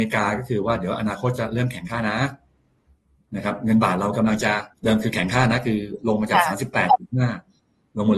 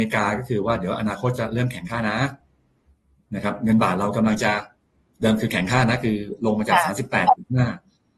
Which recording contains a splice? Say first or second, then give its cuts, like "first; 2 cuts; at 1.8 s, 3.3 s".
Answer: first; 1 cut; at 4.7 s